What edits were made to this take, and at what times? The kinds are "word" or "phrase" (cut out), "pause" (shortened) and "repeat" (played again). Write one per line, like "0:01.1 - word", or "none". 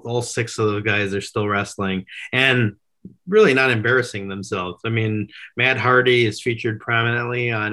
none